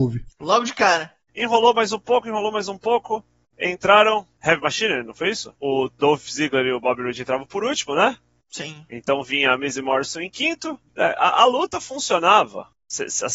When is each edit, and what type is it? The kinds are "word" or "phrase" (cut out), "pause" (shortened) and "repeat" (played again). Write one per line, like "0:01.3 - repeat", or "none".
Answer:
none